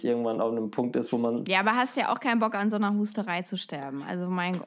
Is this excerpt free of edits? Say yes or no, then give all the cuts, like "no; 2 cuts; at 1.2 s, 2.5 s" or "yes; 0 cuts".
yes; 0 cuts